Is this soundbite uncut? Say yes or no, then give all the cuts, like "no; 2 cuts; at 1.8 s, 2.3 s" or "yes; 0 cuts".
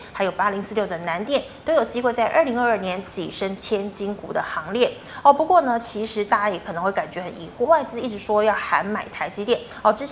no; 1 cut; at 7.6 s